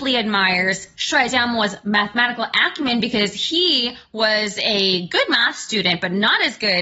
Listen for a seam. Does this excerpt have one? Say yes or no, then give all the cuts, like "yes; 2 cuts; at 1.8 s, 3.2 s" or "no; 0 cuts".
no; 0 cuts